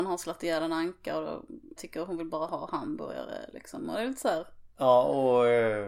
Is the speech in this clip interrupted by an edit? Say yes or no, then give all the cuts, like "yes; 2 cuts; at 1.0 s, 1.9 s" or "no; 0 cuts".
yes; 1 cut; at 1.8 s